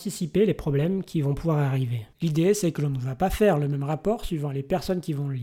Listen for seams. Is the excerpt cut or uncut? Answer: cut